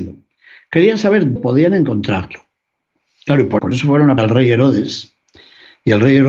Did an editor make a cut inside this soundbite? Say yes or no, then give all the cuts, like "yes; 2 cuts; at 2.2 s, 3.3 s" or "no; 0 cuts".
yes; 3 cuts; at 1.4 s, 3.6 s, 4.2 s